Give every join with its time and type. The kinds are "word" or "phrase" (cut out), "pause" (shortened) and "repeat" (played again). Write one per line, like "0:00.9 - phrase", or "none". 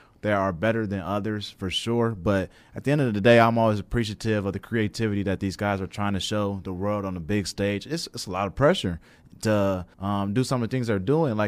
0:09.9 - pause